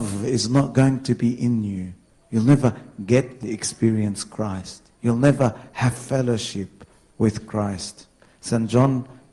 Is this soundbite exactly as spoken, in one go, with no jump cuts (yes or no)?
no